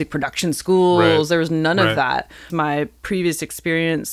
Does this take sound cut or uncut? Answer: cut